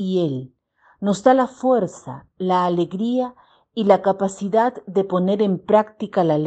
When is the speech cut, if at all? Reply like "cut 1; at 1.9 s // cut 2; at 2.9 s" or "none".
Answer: none